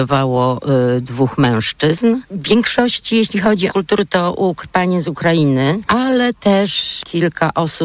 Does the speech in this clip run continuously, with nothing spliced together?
no; 1 cut; at 3.7 s

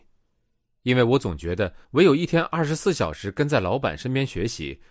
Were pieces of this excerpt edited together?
yes; 1 cut; at 1.8 s

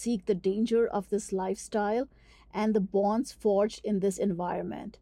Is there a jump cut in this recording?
no; 0 cuts

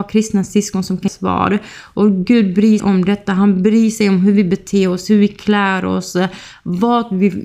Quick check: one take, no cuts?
no; 2 cuts; at 1.1 s, 2.8 s

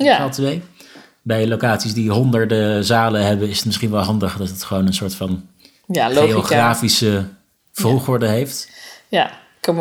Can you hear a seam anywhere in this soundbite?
no; 0 cuts

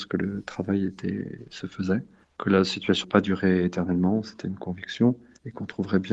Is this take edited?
yes; 1 cut; at 3.0 s

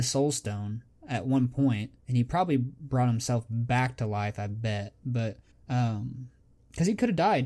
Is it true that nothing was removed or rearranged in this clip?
no; 2 cuts; at 2.0 s, 5.5 s

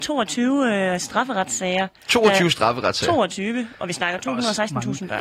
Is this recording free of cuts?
yes; 0 cuts

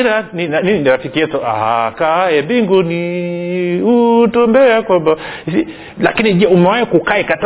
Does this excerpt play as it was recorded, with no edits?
yes; 0 cuts

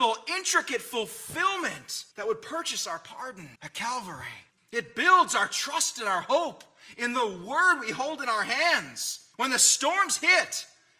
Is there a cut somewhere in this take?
yes; 4 cuts; at 2.1 s, 3.5 s, 4.5 s, 9.3 s

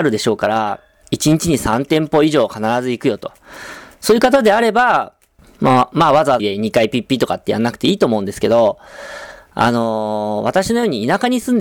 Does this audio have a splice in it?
yes; 3 cuts; at 1.0 s, 5.4 s, 6.4 s

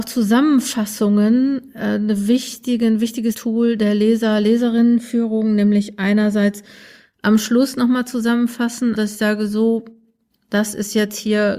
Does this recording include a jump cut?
yes; 2 cuts; at 3.3 s, 8.9 s

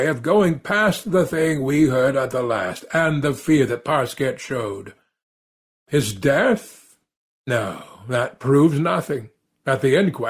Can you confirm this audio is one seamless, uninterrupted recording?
yes; 0 cuts

